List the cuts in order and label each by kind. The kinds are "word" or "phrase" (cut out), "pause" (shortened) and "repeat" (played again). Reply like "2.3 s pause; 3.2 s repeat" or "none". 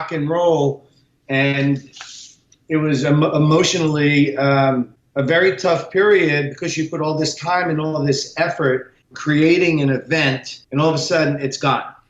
9.1 s word; 10.6 s pause